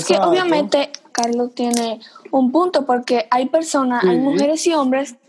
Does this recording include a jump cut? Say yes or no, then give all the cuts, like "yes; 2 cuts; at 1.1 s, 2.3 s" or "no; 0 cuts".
yes; 1 cut; at 1.1 s